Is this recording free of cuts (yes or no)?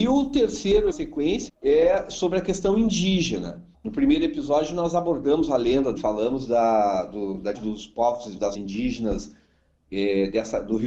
no